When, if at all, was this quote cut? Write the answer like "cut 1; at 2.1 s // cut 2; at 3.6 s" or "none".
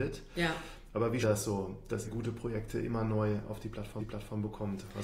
cut 1; at 1.2 s // cut 2; at 2.0 s // cut 3; at 4.0 s